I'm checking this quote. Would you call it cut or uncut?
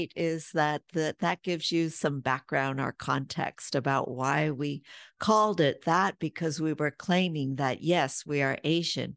uncut